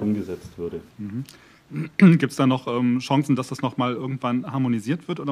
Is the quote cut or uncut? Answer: cut